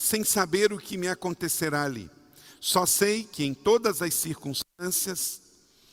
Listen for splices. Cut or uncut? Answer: uncut